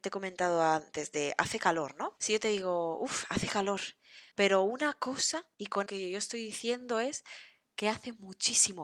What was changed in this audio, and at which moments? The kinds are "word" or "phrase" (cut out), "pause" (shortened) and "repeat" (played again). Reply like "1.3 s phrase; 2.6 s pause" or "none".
4.3 s pause; 5.5 s pause; 5.9 s phrase